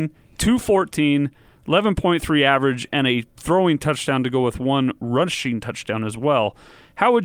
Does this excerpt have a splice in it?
no; 0 cuts

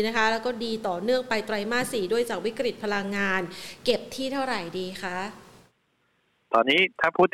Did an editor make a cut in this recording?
no; 0 cuts

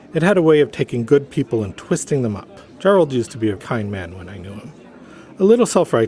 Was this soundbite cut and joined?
yes; 2 cuts; at 2.7 s, 3.6 s

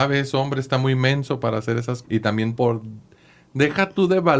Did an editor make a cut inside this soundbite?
yes; 2 cuts; at 2.0 s, 2.6 s

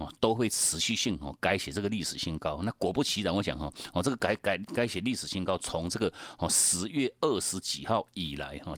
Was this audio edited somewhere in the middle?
no; 0 cuts

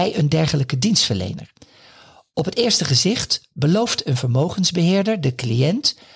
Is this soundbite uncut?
yes; 0 cuts

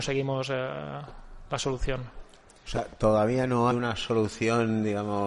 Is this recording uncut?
no; 1 cut; at 3.7 s

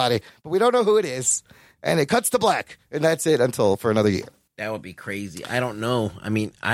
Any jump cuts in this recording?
yes; 1 cut; at 4.5 s

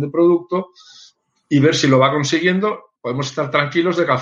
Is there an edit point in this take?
yes; 1 cut; at 3.0 s

